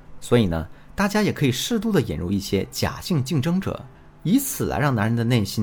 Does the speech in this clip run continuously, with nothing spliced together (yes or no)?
no